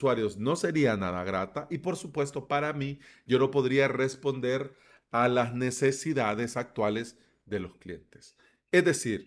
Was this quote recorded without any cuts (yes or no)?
yes